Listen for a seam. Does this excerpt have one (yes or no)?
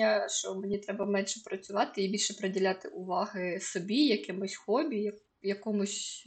no